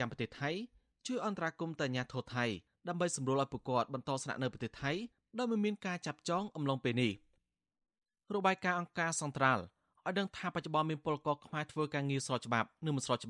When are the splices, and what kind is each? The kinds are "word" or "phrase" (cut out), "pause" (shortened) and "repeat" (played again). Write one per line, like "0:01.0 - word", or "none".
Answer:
none